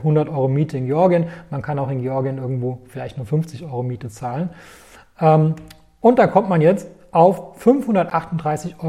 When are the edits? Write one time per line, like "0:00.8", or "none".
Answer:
none

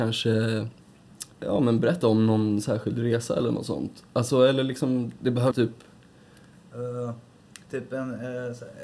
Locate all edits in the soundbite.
0:01.3
0:02.0
0:05.5

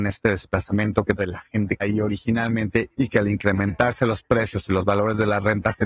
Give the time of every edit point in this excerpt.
0:01.2
0:01.8

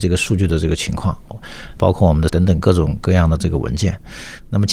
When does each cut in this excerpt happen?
0:01.8
0:02.3

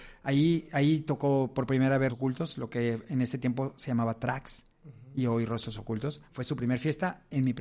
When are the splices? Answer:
0:02.1

